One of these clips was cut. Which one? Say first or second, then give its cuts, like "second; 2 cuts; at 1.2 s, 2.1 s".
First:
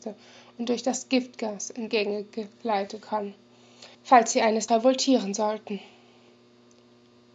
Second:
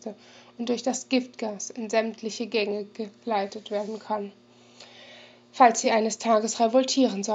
first; 4 cuts; at 1.9 s, 3.0 s, 3.9 s, 4.7 s